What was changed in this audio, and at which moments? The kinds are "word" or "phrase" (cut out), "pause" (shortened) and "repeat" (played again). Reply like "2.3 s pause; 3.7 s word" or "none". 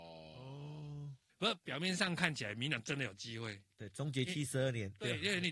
1.3 s pause